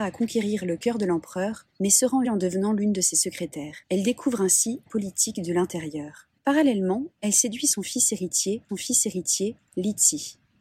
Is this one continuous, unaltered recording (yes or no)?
no